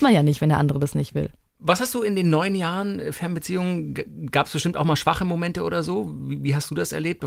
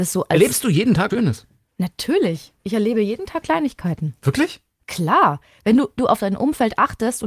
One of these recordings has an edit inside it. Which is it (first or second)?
second